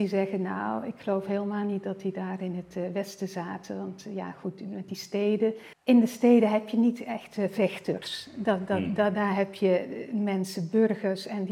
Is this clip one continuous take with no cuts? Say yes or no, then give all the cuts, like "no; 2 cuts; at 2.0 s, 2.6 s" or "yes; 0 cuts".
no; 1 cut; at 5.7 s